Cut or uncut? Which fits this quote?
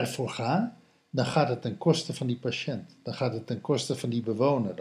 uncut